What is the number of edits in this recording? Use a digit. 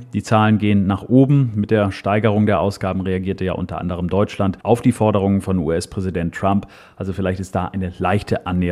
1